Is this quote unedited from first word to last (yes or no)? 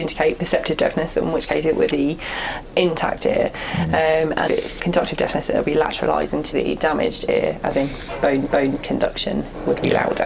no